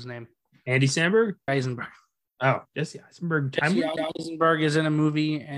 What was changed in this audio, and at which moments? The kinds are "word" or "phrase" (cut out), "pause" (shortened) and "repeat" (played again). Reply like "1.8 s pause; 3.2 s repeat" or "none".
1.5 s word; 2.7 s pause; 4.0 s repeat